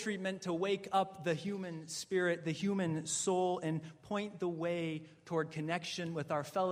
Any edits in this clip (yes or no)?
no